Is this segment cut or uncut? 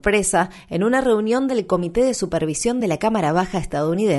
uncut